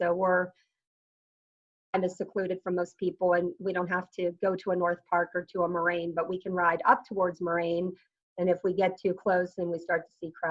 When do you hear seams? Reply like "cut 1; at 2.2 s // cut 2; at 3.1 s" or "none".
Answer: none